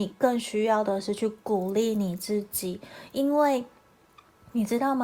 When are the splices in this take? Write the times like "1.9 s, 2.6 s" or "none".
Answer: none